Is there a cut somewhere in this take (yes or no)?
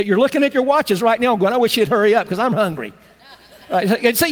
no